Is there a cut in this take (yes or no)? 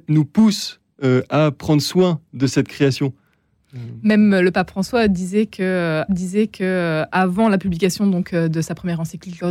yes